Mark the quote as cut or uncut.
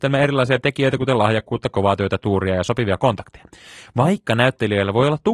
uncut